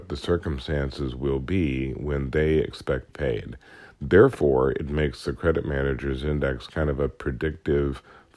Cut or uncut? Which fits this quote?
cut